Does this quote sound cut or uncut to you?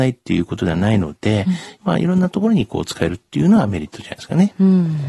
uncut